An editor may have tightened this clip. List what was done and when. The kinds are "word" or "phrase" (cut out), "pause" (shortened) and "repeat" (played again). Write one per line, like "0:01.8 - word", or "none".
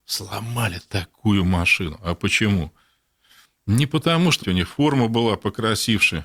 0:04.4 - word

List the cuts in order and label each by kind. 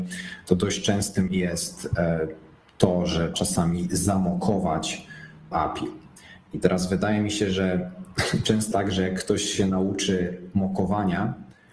0:01.3 - word
0:03.3 - word
0:05.5 - phrase
0:08.7 - word

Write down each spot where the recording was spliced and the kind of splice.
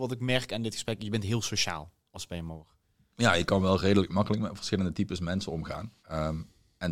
0:03.1 - pause
0:06.0 - pause

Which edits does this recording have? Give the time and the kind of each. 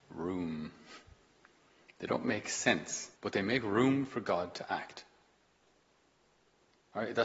0:03.2 - pause

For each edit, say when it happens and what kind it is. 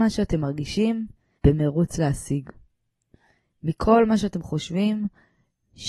0:01.4 - word

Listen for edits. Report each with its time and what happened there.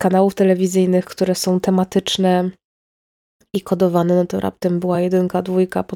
none

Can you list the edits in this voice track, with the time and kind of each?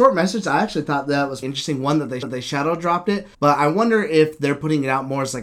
0:01.4 - word
0:02.2 - repeat
0:03.3 - pause

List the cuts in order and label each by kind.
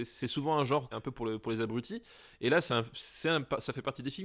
0:00.9 - word
0:02.7 - word

